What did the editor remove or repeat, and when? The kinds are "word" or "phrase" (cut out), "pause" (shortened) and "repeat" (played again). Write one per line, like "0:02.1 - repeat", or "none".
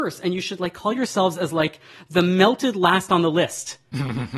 none